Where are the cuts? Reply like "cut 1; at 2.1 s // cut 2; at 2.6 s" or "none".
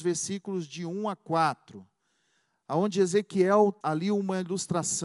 cut 1; at 3.8 s